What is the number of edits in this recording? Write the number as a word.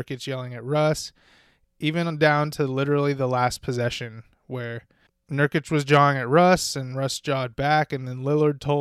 one